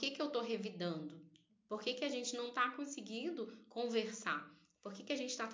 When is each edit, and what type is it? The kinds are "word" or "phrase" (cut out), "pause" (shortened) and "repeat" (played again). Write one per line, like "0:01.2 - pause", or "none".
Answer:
none